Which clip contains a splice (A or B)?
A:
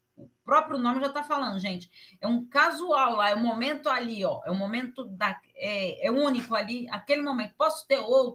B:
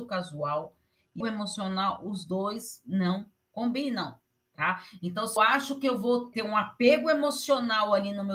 B